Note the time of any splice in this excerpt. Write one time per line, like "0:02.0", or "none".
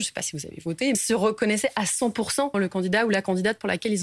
0:00.9
0:02.5